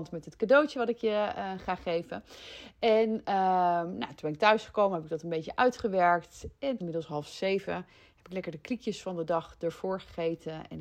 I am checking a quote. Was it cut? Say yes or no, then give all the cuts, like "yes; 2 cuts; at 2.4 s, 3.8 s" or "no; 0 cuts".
yes; 1 cut; at 6.8 s